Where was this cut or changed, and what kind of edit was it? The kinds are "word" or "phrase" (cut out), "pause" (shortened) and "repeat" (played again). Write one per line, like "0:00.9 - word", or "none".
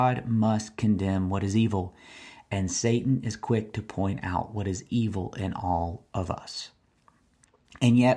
none

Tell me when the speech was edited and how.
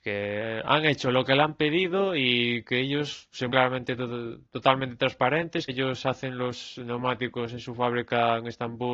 0:03.5 - word
0:05.7 - word

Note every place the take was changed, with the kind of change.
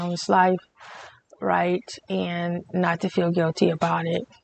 none

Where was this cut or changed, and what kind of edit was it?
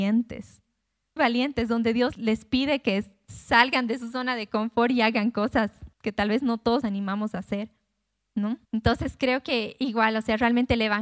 0:01.2 - word
0:02.1 - word
0:05.9 - pause
0:06.8 - word
0:08.6 - pause

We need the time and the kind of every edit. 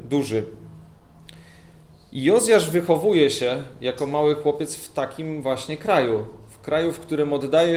none

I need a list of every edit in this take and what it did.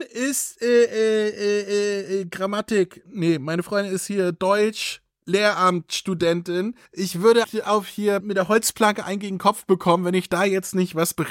0:06.9 - pause
0:07.4 - word
0:08.2 - word

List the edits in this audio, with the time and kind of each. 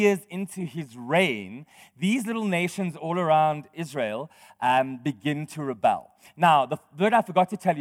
none

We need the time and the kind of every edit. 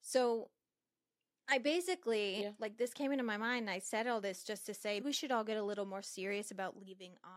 0:05.0 - word

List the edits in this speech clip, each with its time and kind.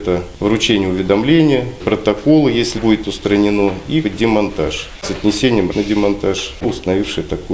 0:01.8 - word
0:02.8 - word
0:04.0 - word
0:05.7 - word
0:06.6 - word

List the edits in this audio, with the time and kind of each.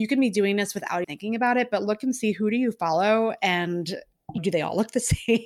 0:01.0 - word
0:04.4 - word

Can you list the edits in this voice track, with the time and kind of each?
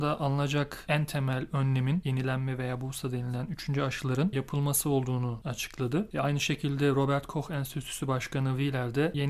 none

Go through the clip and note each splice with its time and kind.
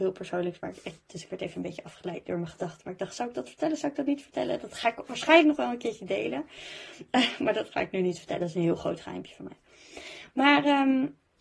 none

